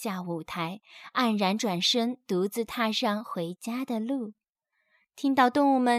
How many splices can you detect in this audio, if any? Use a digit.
0